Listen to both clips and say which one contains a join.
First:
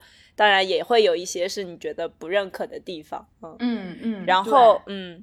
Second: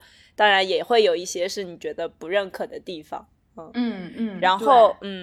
first; 1 cut; at 3.3 s

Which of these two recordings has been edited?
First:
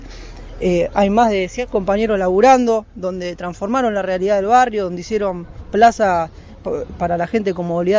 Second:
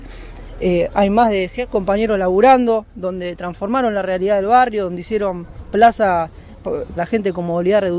second; 1 cut; at 7.0 s

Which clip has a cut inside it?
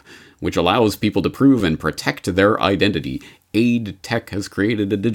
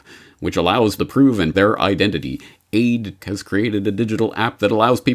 second; 3 cuts; at 1.0 s, 1.5 s, 3.2 s

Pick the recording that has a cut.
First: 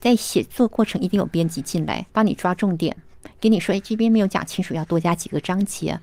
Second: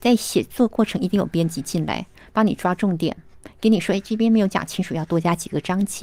first; 1 cut; at 2.1 s

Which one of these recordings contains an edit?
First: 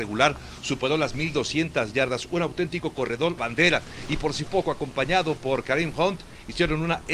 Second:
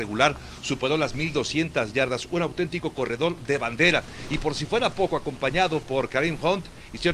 first; 2 cuts; at 3.4 s, 4.5 s

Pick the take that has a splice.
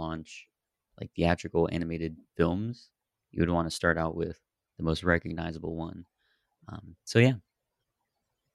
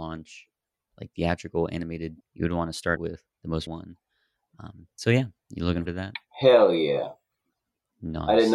second; 7 cuts; at 2.2 s, 3.0 s, 3.3 s, 3.7 s, 5.4 s, 5.9 s, 6.3 s

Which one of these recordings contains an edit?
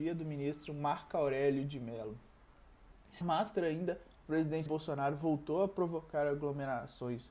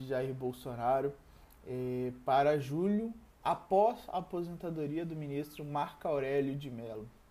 first; 2 cuts; at 3.2 s, 4.7 s

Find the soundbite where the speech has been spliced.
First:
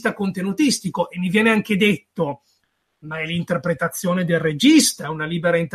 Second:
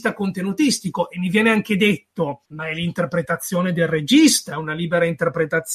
second; 1 cut; at 2.5 s

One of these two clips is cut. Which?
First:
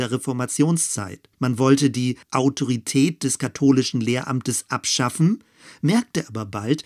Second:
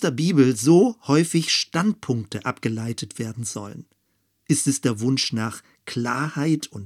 first; 2 cuts; at 1.3 s, 2.2 s

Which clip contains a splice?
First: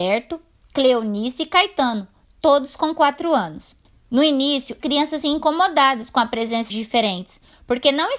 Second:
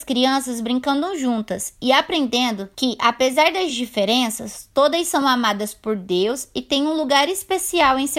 first; 3 cuts; at 4.8 s, 5.2 s, 6.7 s

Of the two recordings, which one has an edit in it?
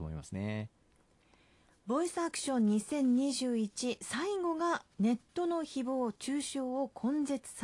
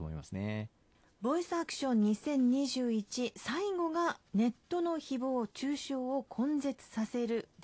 second; 1 cut; at 0.9 s

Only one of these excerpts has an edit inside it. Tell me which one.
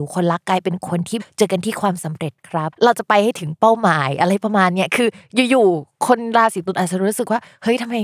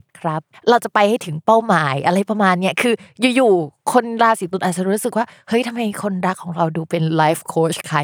first; 1 cut; at 2.7 s

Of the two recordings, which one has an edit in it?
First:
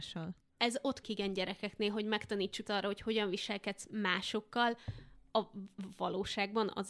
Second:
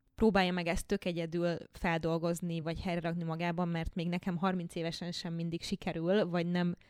first; 3 cuts; at 1.0 s, 2.6 s, 5.3 s

